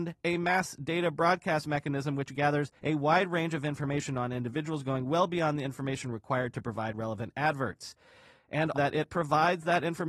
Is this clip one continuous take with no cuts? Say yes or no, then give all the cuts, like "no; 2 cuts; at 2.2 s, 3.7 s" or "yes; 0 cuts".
no; 2 cuts; at 2.8 s, 8.7 s